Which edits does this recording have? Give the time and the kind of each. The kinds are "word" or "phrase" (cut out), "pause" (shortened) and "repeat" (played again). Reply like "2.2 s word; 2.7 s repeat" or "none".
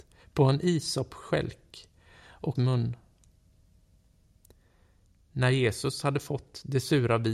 2.6 s phrase